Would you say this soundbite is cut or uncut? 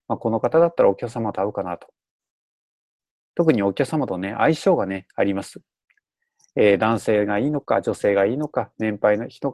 uncut